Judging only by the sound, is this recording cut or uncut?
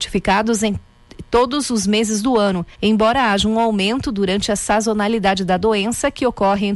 cut